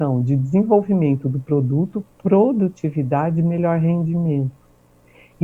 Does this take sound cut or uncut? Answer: uncut